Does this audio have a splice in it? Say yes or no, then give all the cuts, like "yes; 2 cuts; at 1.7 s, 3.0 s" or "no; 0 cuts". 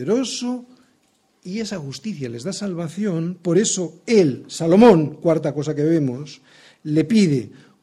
no; 0 cuts